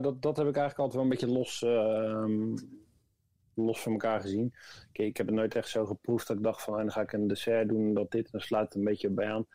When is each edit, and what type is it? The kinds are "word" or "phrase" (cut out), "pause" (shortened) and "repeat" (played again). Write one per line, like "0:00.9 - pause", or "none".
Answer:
none